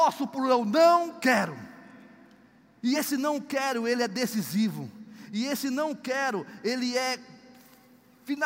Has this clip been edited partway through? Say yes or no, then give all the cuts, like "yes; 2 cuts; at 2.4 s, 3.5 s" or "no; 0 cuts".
no; 0 cuts